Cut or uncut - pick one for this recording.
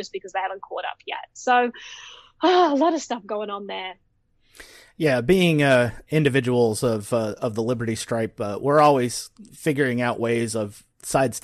uncut